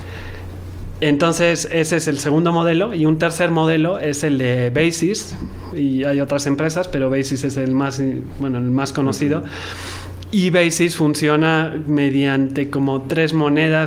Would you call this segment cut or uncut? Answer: uncut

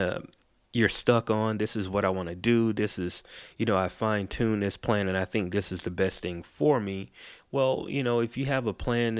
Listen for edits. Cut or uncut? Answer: uncut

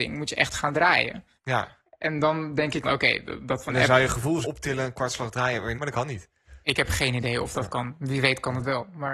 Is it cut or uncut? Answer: cut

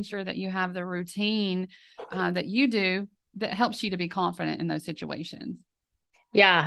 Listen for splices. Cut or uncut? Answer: uncut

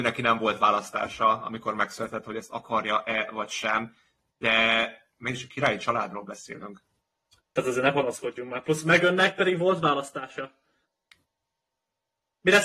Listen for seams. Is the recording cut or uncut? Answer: uncut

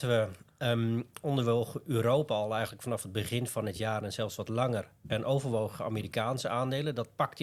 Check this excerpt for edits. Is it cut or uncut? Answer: uncut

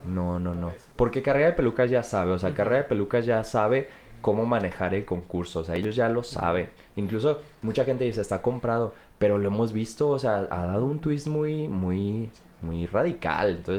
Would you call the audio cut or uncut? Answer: uncut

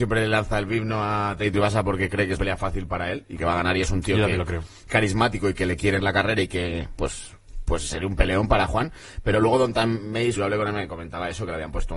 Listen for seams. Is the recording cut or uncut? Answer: cut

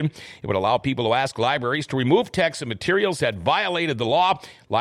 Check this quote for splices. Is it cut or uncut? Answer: uncut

